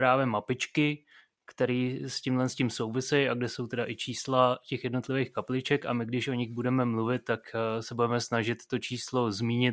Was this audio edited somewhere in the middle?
no; 0 cuts

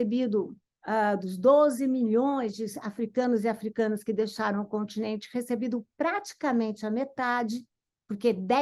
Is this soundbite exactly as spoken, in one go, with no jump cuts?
yes; 0 cuts

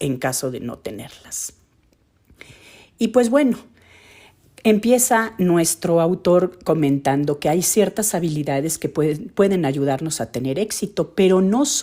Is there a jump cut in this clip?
no; 0 cuts

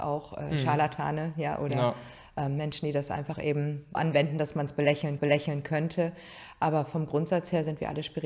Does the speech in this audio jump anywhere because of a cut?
yes; 2 cuts; at 3.9 s, 5.2 s

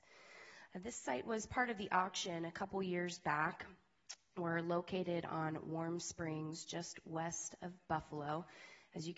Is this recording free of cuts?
yes; 0 cuts

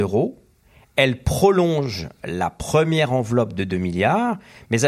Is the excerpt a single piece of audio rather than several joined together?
yes; 0 cuts

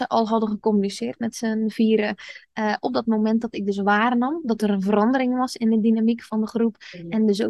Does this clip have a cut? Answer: no; 0 cuts

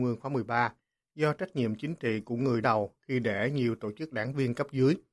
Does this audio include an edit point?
yes; 2 cuts; at 2.6 s, 4.1 s

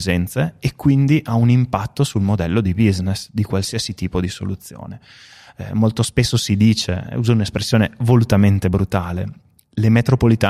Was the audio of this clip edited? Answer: no; 0 cuts

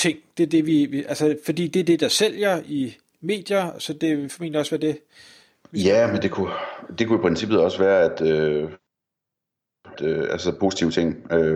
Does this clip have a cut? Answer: yes; 1 cut; at 10.0 s

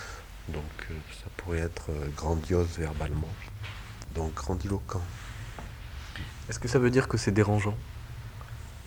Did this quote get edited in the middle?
no; 0 cuts

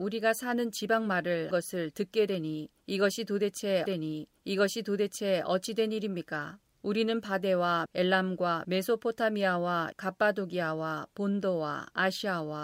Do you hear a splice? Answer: yes; 4 cuts; at 1.5 s, 3.9 s, 7.9 s, 9.9 s

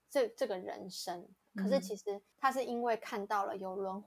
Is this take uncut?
no; 2 cuts; at 1.4 s, 2.3 s

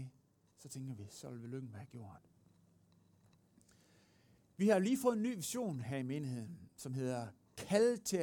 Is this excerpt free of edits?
yes; 0 cuts

